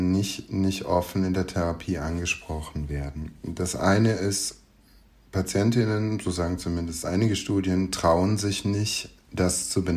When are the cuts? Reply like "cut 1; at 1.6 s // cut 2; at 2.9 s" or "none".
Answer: none